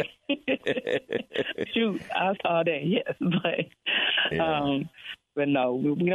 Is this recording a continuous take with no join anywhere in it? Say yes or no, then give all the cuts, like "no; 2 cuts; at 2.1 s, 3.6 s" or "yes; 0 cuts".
no; 2 cuts; at 1.7 s, 2.4 s